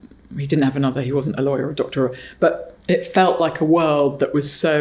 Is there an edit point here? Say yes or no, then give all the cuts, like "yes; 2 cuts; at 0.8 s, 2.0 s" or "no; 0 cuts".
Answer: no; 0 cuts